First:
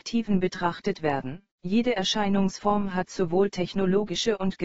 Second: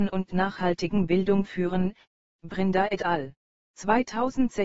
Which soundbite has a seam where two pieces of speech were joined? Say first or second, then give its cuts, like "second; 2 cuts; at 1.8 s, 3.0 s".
first; 1 cut; at 1.5 s